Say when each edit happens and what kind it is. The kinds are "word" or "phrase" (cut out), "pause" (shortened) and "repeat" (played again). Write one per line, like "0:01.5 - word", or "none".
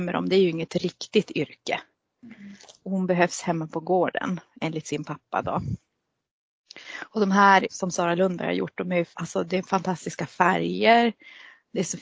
0:07.7 - word
0:09.1 - pause